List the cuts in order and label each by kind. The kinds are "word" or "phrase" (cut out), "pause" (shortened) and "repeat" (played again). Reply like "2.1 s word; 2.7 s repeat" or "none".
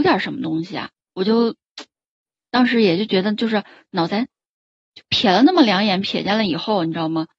0.9 s pause